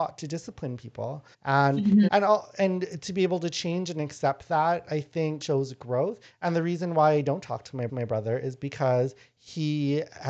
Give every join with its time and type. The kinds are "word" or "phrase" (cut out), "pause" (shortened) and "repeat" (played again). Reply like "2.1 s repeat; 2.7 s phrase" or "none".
1.3 s pause; 2.1 s word; 5.4 s word; 7.9 s repeat